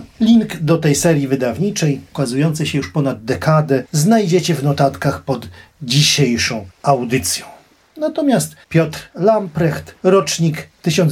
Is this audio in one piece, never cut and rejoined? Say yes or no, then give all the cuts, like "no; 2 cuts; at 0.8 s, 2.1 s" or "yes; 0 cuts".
no; 2 cuts; at 6.7 s, 8.6 s